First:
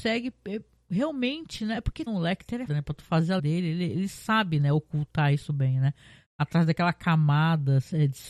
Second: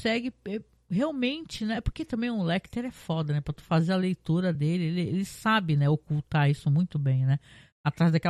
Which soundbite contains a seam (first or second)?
first